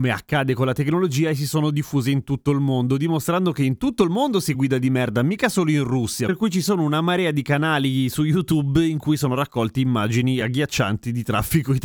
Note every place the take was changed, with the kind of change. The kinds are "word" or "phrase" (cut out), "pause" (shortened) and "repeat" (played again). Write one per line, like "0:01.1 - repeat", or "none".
none